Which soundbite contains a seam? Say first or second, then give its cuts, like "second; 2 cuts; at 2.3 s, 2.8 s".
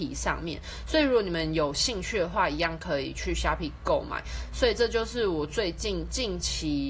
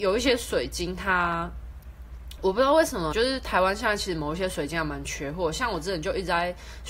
second; 1 cut; at 3.1 s